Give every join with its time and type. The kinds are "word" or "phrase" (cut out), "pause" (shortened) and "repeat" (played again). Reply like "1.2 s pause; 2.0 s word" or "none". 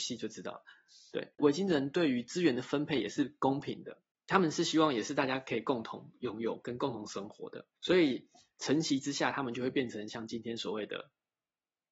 7.8 s pause